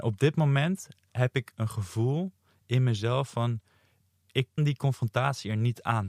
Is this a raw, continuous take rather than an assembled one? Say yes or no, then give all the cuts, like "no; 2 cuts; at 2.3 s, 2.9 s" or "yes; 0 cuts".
no; 1 cut; at 4.6 s